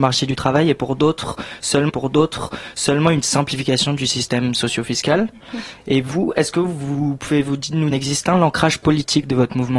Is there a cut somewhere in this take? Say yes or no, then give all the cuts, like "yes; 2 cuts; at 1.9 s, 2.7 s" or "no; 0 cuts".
yes; 2 cuts; at 1.9 s, 7.9 s